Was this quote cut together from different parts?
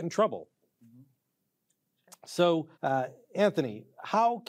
yes; 1 cut; at 2.7 s

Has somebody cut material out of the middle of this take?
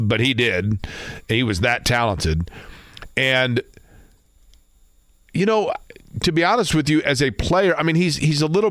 no; 0 cuts

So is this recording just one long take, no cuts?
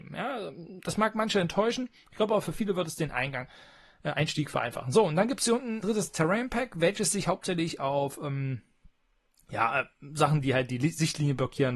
no; 1 cut; at 5.8 s

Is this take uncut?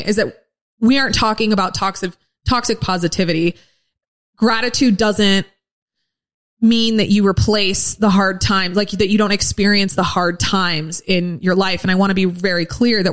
yes; 0 cuts

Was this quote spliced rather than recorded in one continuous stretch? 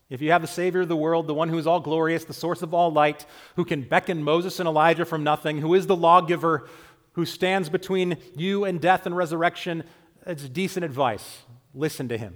no; 0 cuts

